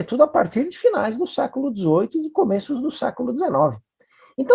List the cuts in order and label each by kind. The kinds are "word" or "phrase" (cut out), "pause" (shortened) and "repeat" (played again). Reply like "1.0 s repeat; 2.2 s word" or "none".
none